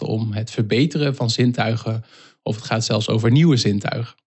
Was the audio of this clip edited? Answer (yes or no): no